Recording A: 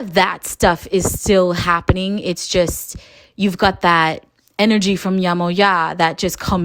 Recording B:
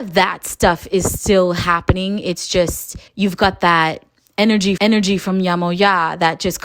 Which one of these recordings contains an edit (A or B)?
B